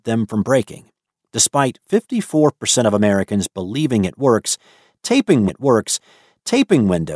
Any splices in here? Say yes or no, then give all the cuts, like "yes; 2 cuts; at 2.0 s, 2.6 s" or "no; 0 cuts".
yes; 1 cut; at 5.5 s